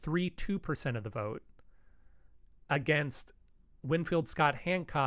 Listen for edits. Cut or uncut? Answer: uncut